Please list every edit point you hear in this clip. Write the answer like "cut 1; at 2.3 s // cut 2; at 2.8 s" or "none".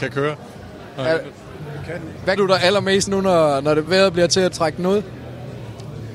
cut 1; at 2.4 s // cut 2; at 3.1 s // cut 3; at 3.9 s // cut 4; at 4.5 s